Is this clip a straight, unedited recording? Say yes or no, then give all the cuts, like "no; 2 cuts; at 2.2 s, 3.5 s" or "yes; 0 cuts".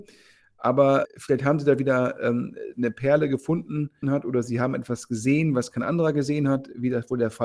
no; 3 cuts; at 1.0 s, 2.7 s, 4.0 s